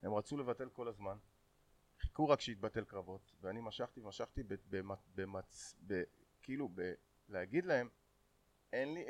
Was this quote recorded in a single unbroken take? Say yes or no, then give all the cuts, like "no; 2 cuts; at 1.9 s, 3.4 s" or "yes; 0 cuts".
yes; 0 cuts